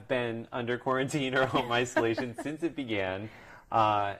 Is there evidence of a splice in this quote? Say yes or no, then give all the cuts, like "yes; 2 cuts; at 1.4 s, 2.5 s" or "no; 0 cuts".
no; 0 cuts